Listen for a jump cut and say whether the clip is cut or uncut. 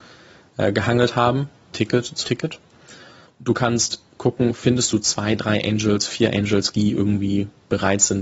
cut